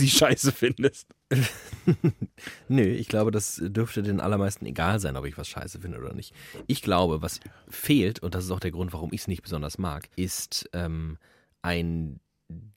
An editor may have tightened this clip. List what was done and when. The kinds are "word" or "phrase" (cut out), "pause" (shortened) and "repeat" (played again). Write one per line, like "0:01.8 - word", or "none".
0:10.1 - pause